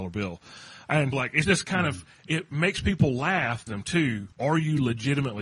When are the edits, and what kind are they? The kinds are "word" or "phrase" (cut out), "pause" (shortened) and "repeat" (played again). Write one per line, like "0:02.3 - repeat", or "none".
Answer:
0:01.1 - word
0:01.4 - word
0:03.7 - phrase
0:04.3 - pause